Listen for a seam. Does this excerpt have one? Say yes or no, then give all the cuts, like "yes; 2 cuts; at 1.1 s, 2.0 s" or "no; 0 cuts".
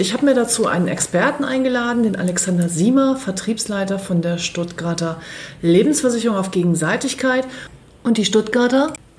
no; 0 cuts